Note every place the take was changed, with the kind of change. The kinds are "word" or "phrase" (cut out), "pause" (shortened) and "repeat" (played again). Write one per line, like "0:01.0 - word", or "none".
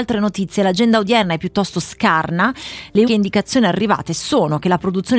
0:03.1 - word